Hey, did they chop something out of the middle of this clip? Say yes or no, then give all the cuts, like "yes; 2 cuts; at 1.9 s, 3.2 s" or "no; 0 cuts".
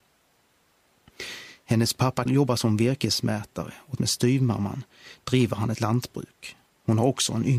yes; 3 cuts; at 2.3 s, 4.0 s, 5.8 s